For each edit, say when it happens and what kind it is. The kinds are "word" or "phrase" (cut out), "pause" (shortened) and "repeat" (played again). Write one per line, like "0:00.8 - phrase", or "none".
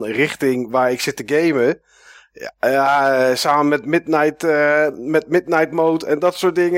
none